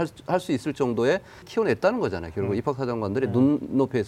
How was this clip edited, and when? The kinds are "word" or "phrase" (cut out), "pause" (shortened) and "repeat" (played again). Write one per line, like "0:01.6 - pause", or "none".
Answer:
0:01.4 - word